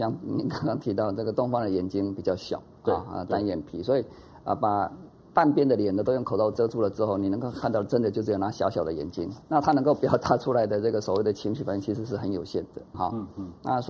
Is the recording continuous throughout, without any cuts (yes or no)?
no